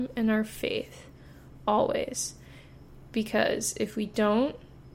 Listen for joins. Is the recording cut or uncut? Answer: uncut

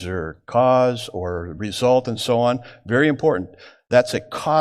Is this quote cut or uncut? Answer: uncut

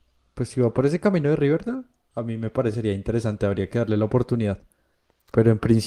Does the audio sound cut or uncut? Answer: uncut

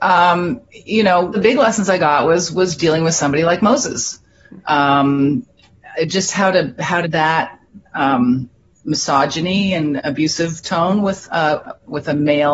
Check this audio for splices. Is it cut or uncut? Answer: cut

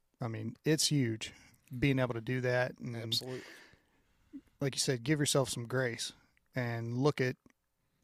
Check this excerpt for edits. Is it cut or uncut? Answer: uncut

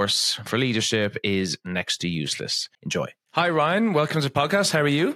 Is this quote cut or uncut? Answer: uncut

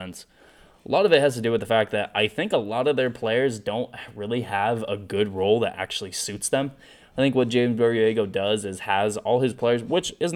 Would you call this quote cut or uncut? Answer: uncut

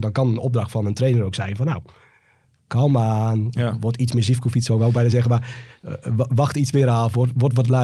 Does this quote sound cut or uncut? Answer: uncut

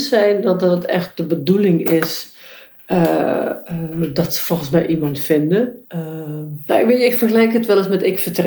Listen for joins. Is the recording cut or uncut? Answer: cut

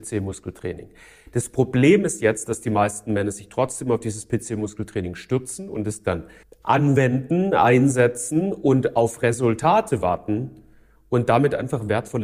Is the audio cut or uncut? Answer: cut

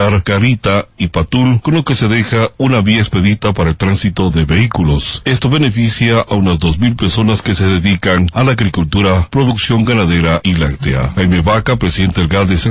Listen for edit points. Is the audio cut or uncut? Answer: uncut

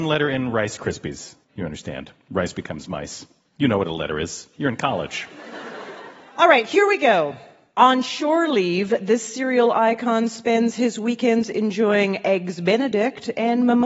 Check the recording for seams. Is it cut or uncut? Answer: cut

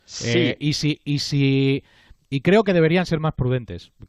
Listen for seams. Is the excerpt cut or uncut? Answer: uncut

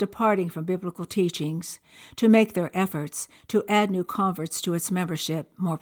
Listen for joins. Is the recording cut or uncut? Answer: uncut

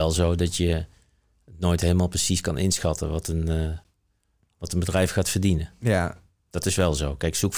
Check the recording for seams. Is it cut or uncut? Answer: uncut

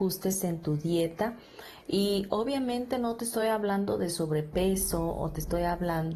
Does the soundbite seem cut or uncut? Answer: uncut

